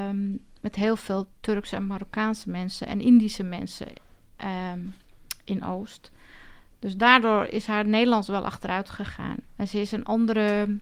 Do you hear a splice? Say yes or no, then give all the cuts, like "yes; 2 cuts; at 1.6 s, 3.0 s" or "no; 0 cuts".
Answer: no; 0 cuts